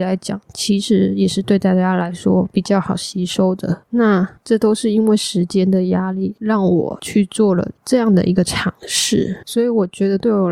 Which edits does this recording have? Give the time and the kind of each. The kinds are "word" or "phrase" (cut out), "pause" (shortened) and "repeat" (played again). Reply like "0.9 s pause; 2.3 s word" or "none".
4.4 s pause